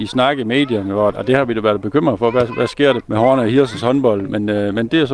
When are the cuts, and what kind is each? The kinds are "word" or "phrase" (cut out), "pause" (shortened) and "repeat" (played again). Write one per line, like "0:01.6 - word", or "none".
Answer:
0:01.1 - word
0:03.0 - word